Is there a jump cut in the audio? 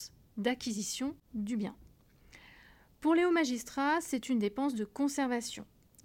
no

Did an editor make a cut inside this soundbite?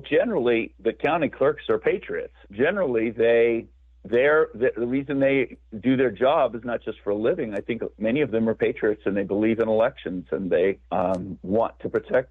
yes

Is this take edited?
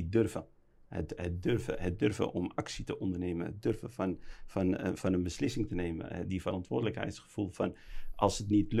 no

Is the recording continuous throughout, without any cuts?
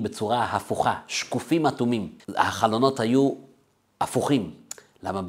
no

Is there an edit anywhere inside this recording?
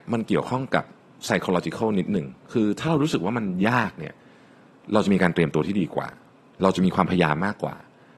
no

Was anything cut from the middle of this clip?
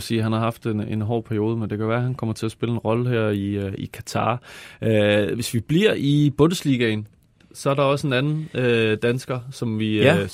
no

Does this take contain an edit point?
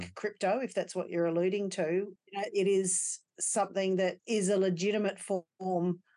yes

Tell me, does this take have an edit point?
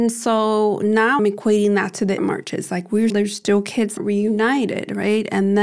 yes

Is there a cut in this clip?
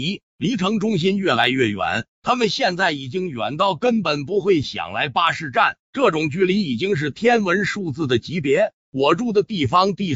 yes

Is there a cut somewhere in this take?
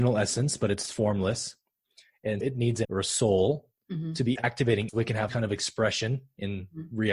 yes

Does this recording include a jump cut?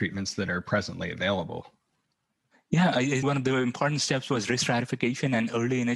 yes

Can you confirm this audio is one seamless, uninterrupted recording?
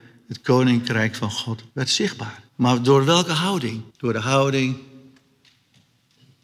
no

